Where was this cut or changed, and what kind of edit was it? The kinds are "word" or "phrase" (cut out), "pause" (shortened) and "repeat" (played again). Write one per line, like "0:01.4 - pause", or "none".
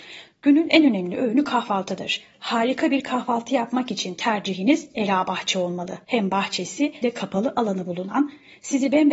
0:06.0 - pause
0:07.0 - word

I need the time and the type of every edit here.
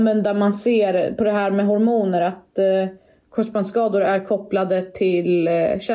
none

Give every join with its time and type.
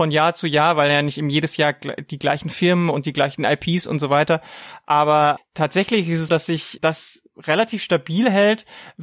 0:05.4 - word
0:06.3 - word
0:06.8 - word

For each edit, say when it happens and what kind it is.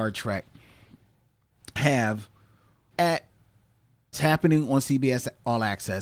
0:02.9 - word
0:04.1 - word

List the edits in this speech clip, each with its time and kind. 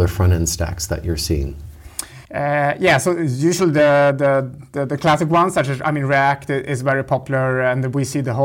0:02.3 - pause

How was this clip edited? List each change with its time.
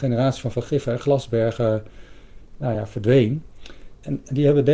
none

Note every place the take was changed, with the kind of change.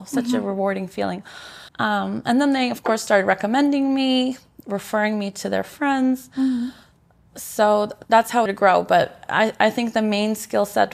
0:01.7 - pause
0:08.1 - word
0:08.5 - phrase

